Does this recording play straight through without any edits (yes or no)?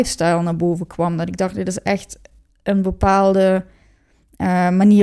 yes